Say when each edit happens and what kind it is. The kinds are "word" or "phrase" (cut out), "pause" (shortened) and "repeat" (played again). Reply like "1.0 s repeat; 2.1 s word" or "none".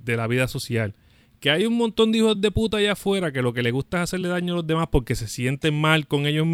none